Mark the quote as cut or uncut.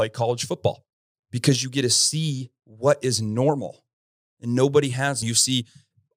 cut